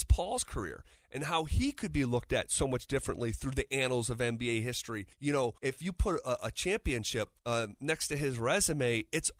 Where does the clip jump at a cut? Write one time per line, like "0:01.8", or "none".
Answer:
0:05.1
0:05.6
0:07.4